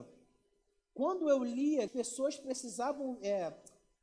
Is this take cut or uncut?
cut